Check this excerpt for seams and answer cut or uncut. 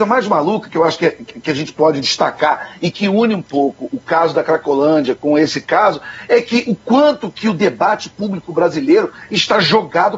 cut